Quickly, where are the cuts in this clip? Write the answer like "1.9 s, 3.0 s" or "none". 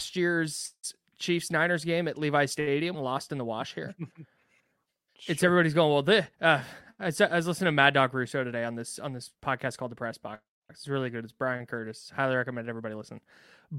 2.9 s, 6.3 s, 9.3 s